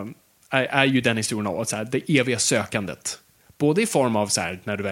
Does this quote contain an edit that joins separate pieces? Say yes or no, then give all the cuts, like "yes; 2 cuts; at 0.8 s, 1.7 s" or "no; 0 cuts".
no; 0 cuts